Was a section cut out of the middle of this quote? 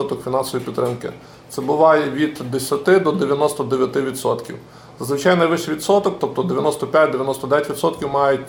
no; 0 cuts

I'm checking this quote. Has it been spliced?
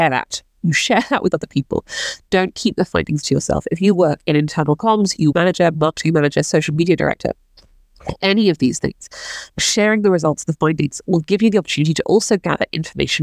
yes; 3 cuts; at 3.2 s, 5.3 s, 9.5 s

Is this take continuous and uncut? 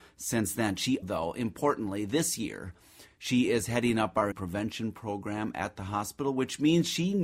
no; 2 cuts; at 1.0 s, 4.3 s

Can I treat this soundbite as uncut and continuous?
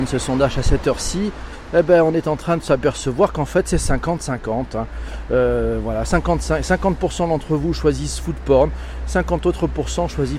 yes; 0 cuts

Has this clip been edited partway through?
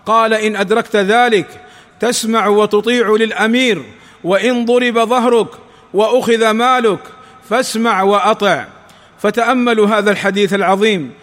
no; 0 cuts

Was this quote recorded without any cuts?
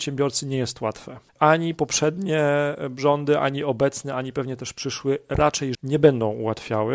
no; 2 cuts; at 1.3 s, 5.7 s

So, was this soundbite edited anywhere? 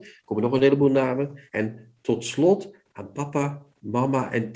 yes; 1 cut; at 1.5 s

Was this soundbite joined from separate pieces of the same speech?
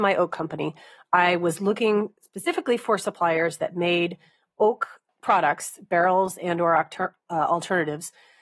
yes; 1 cut; at 5.1 s

